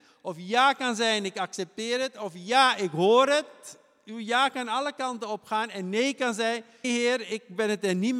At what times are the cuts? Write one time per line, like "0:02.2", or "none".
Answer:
0:06.8